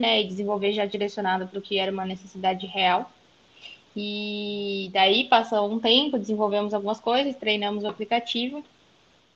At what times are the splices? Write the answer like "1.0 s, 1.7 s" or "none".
none

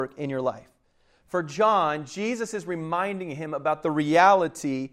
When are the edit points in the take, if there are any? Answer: none

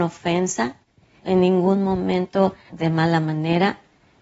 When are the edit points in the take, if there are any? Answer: 1.2 s, 2.7 s

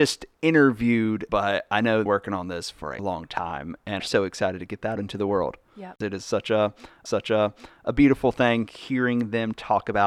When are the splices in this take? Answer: 1.3 s, 2.1 s, 3.0 s, 4.0 s, 5.0 s, 7.1 s

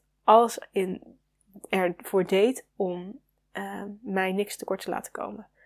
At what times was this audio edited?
none

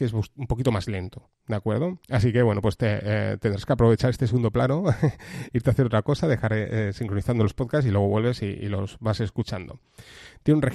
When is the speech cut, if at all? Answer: 2.0 s

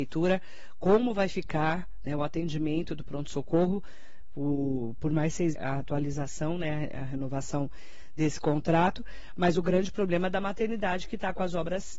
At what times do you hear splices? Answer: 5.5 s

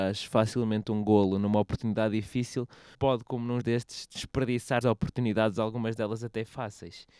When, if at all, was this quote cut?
2.9 s, 3.6 s, 4.8 s

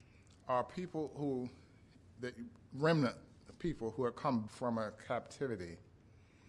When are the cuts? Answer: 4.5 s

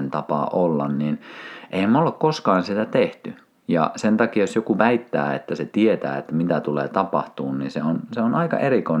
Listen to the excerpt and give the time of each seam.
none

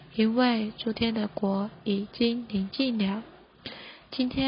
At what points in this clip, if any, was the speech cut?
none

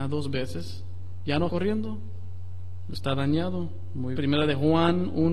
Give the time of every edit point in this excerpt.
1.5 s, 4.1 s

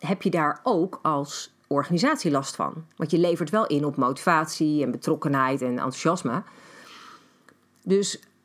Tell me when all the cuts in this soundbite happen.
1.6 s

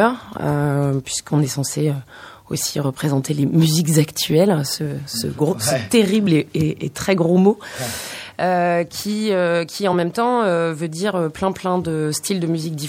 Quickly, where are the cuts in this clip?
none

